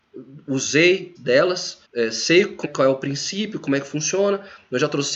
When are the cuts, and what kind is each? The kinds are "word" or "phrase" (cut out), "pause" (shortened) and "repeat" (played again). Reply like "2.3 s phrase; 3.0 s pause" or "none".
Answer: 1.1 s word; 1.8 s pause; 2.6 s word